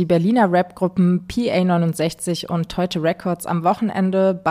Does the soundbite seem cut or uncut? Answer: uncut